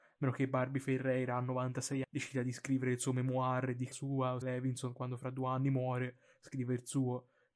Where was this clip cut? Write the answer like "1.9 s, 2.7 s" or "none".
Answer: 2.0 s, 3.9 s, 4.4 s